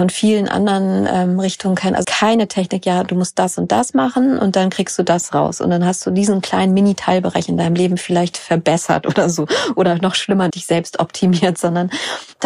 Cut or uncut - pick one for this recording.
cut